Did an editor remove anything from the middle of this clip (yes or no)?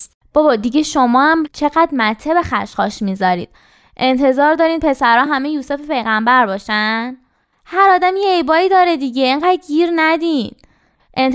no